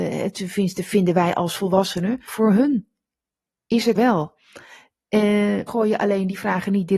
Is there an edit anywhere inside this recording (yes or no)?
yes